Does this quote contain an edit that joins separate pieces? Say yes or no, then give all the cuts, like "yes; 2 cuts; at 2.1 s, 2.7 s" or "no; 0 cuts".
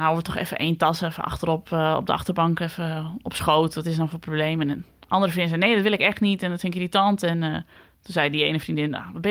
no; 0 cuts